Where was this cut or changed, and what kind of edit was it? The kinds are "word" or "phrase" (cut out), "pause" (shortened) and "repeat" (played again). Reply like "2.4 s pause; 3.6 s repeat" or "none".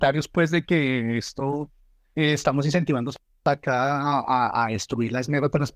none